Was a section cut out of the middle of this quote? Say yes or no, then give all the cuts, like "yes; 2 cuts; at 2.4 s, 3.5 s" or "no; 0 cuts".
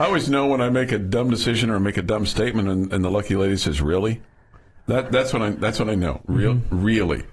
no; 0 cuts